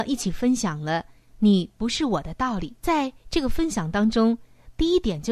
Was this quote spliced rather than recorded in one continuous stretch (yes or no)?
yes